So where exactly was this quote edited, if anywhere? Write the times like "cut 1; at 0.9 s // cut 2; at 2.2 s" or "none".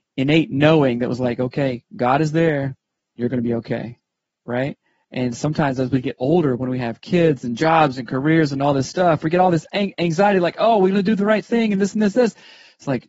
none